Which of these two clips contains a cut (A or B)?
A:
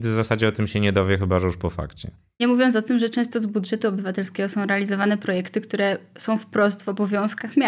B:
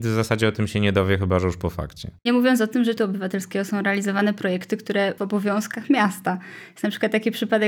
B